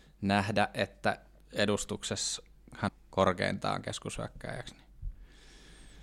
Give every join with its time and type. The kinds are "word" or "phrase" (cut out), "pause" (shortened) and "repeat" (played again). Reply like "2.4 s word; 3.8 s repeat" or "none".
2.9 s phrase

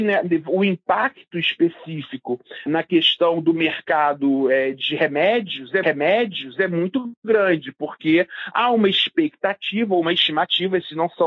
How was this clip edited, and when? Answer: 2.7 s word; 5.8 s repeat

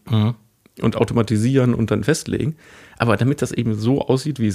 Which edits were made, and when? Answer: none

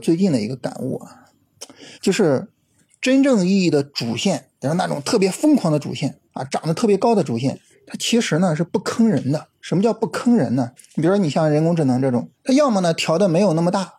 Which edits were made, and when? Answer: 1.9 s pause; 6.2 s pause; 7.7 s pause; 9.5 s pause; 10.8 s pause; 12.3 s pause

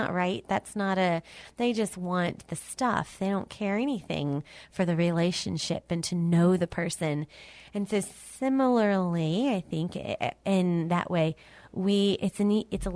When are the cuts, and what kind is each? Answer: none

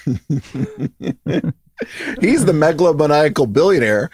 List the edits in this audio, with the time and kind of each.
none

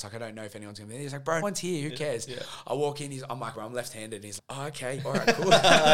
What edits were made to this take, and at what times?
1.4 s word; 3.5 s word; 4.4 s word; 5.0 s word

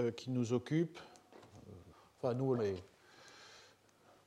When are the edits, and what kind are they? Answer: 1.9 s pause; 2.5 s word

